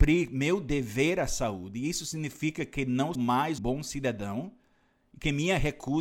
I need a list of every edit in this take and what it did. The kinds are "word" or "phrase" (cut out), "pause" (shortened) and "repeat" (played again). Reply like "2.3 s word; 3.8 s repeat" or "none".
3.1 s word; 3.6 s word